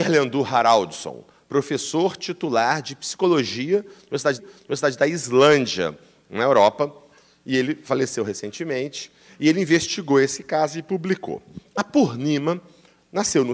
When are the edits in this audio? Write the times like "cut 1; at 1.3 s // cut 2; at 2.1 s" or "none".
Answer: cut 1; at 4.4 s